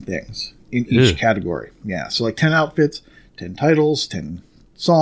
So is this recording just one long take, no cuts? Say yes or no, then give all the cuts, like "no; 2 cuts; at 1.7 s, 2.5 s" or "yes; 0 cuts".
yes; 0 cuts